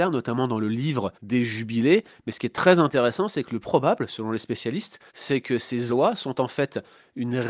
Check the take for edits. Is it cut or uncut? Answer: cut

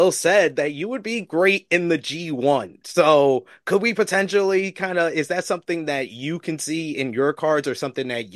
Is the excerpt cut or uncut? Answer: uncut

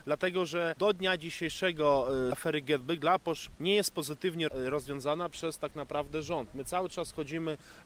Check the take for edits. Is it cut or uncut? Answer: cut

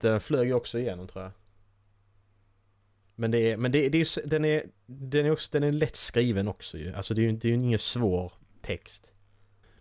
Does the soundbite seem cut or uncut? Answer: uncut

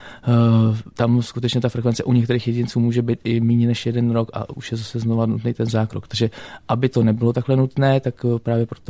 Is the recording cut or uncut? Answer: cut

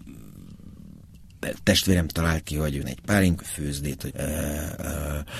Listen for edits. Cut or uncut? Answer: cut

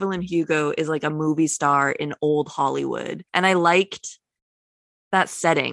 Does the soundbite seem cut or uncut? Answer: cut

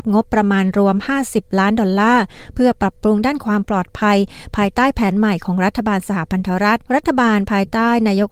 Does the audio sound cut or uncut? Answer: cut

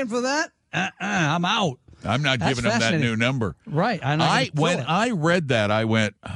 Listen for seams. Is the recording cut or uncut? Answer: uncut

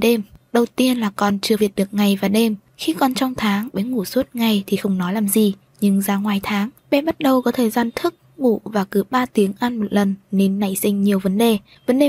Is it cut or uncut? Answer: cut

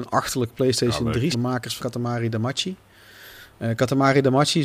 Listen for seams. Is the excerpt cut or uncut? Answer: cut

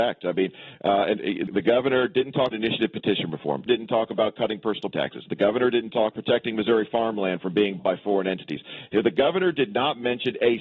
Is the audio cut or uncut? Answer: cut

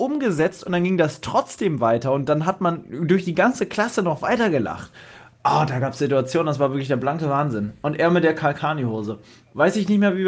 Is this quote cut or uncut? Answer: uncut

